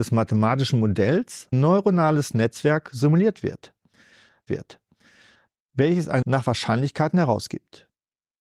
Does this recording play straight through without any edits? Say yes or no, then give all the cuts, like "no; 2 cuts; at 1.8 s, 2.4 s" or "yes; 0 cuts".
no; 3 cuts; at 1.5 s, 4.5 s, 6.2 s